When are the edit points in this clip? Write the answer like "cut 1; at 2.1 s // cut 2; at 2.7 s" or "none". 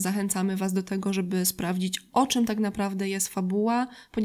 none